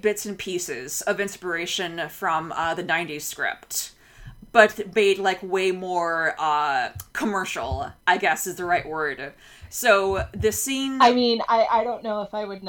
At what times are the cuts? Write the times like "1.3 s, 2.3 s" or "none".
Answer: 8.0 s